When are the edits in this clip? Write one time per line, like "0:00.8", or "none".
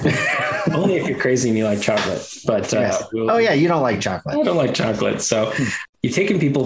none